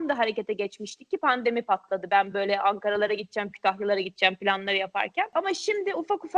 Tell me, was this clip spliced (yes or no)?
no